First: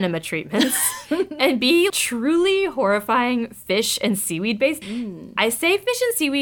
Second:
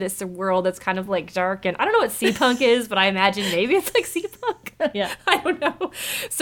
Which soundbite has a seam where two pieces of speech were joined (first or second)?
first